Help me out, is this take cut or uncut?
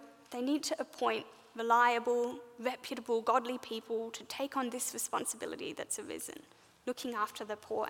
uncut